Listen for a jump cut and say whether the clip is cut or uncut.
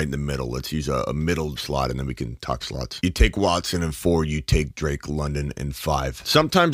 cut